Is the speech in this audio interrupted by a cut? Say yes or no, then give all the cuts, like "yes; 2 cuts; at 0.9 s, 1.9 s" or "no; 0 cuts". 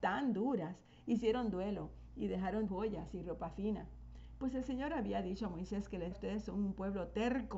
yes; 2 cuts; at 2.7 s, 6.1 s